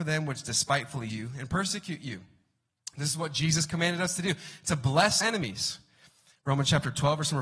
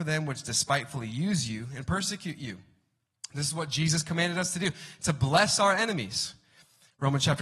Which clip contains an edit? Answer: first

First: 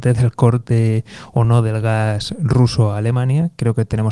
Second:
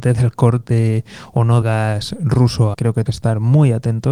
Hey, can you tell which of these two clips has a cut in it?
second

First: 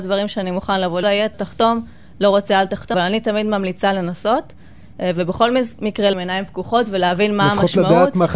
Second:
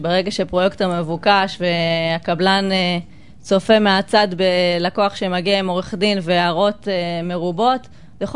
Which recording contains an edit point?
first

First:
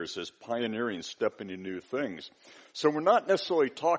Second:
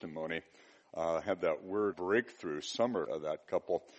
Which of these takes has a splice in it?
second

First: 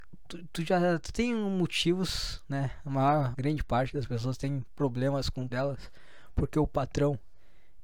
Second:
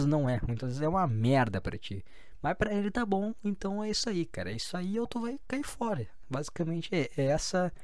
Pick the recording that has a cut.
first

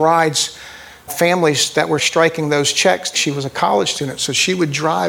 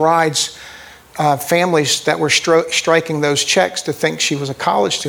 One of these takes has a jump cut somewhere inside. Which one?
first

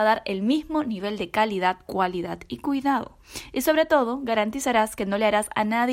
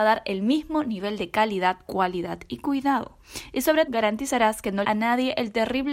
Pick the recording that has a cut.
second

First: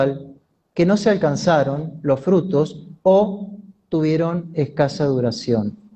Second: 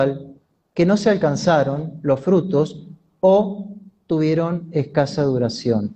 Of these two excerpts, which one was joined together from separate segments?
first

